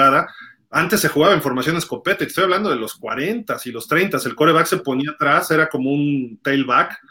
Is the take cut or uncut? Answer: uncut